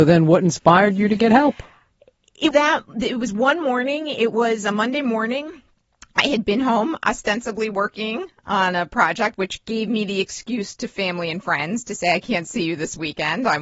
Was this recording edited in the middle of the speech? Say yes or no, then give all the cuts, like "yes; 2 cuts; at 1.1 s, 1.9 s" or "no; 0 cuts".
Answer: yes; 1 cut; at 2.5 s